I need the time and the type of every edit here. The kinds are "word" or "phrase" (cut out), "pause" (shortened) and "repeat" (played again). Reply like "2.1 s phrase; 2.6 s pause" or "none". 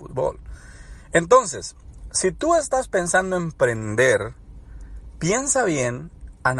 none